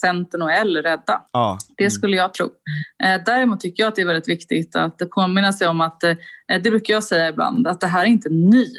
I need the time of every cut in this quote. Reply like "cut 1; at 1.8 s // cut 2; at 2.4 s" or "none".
cut 1; at 1.3 s